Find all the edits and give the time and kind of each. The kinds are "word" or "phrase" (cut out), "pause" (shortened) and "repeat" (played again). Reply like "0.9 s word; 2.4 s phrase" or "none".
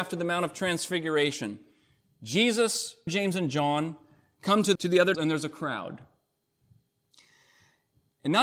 3.1 s word; 4.8 s word; 5.1 s word